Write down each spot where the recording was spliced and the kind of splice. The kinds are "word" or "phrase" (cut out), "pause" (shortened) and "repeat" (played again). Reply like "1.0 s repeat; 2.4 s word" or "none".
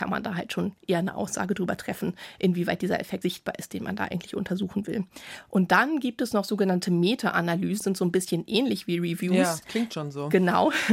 3.2 s word; 7.8 s word